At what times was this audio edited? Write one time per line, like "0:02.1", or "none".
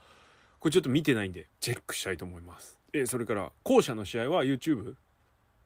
0:01.5
0:02.8